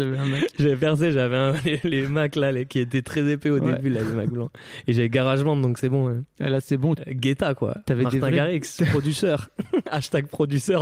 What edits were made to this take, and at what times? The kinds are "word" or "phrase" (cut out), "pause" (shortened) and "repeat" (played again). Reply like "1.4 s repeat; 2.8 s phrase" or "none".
7.0 s phrase